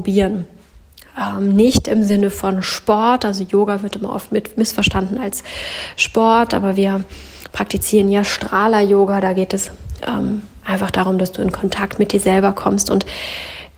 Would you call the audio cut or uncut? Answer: uncut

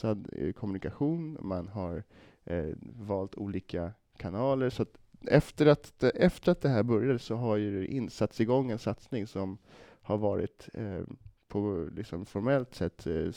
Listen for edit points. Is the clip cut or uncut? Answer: uncut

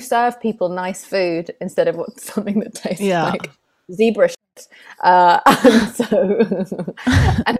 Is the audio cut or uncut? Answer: uncut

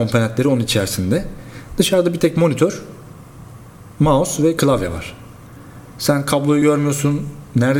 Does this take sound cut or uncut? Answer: uncut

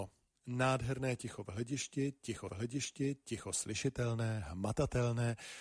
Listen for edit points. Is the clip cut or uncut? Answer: cut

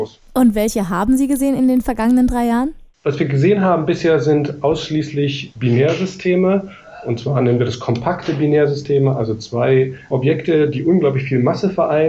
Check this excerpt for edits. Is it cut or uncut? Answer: cut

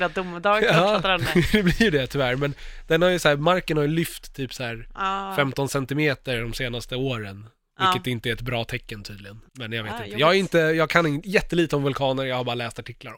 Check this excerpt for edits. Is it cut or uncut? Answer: cut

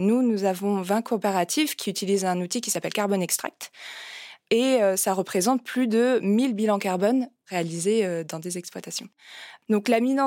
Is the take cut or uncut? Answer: uncut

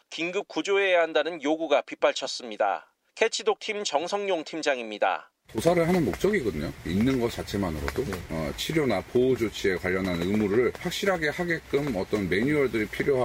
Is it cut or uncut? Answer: uncut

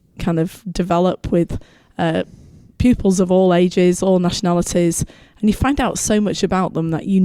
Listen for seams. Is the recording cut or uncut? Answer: uncut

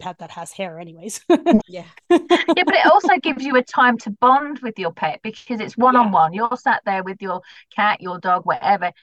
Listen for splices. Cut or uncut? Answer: cut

